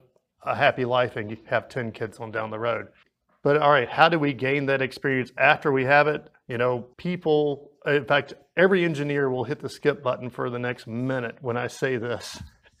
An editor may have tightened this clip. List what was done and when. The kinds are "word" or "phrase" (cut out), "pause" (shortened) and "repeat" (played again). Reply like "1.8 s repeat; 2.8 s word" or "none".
3.0 s pause; 6.9 s pause